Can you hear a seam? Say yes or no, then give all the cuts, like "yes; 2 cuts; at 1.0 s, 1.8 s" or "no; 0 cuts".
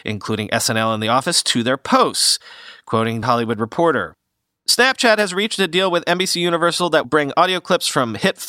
yes; 2 cuts; at 3.2 s, 7.0 s